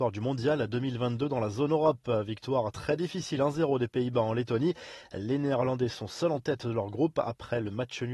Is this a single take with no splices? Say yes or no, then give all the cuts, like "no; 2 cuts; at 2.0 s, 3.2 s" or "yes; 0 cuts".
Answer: yes; 0 cuts